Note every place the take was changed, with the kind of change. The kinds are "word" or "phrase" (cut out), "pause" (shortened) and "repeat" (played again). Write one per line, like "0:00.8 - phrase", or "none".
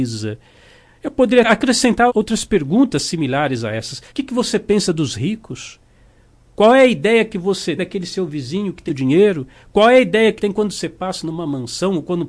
0:01.4 - word
0:02.1 - word
0:04.1 - pause
0:07.8 - word
0:08.9 - word
0:10.4 - word